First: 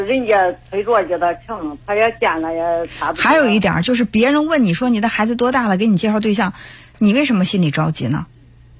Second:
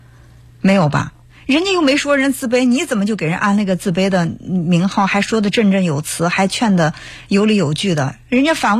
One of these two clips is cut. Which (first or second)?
second